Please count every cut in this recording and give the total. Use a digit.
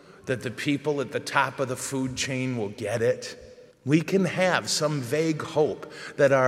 1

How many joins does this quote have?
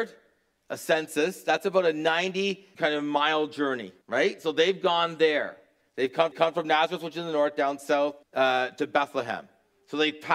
4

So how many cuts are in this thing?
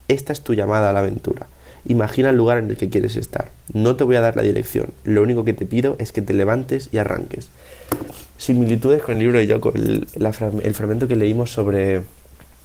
0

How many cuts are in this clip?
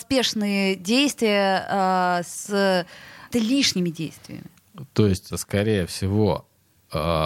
2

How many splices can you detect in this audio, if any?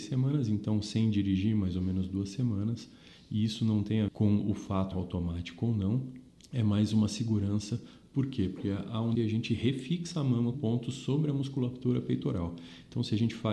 5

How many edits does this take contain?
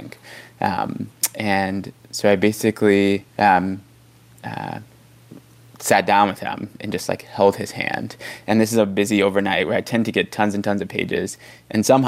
1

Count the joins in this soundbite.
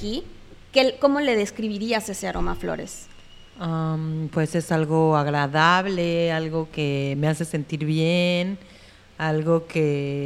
0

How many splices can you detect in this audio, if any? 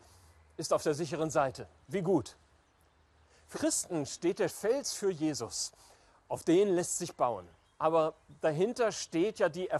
4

